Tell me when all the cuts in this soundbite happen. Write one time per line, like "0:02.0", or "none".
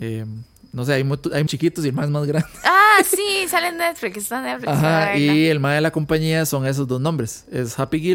0:01.5